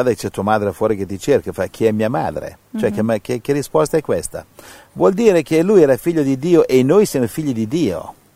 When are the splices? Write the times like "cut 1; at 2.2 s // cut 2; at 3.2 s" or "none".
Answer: none